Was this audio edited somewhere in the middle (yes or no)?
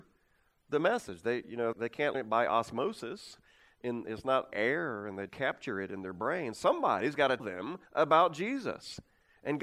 yes